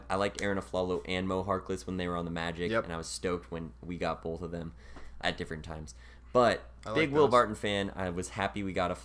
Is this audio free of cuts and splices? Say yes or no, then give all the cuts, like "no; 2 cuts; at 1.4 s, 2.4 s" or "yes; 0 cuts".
no; 1 cut; at 5.2 s